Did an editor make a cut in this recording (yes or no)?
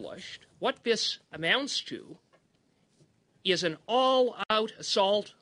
no